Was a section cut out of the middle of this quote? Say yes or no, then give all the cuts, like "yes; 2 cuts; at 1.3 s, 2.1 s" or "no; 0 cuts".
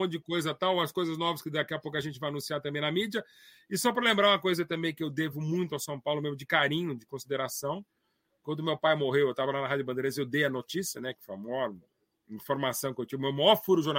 no; 0 cuts